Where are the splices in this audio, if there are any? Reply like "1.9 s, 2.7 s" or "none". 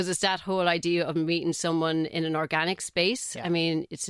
none